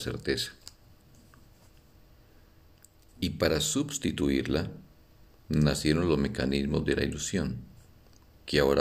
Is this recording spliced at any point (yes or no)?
no